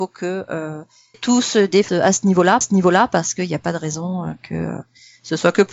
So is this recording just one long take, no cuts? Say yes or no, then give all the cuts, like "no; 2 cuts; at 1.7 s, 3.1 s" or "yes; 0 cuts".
no; 3 cuts; at 1.1 s, 1.9 s, 2.6 s